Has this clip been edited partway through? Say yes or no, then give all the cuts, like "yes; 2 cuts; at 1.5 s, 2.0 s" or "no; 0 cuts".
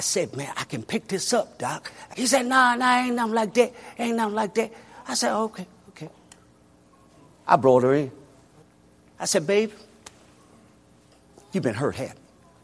yes; 2 cuts; at 2.1 s, 8.6 s